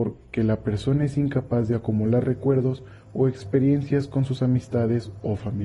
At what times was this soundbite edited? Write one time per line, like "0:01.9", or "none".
none